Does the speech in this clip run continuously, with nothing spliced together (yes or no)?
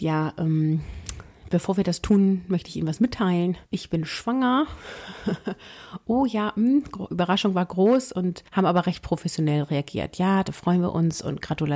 no